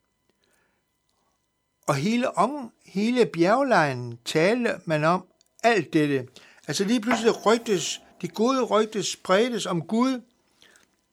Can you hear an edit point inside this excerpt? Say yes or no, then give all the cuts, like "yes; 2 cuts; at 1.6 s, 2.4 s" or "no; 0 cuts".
no; 0 cuts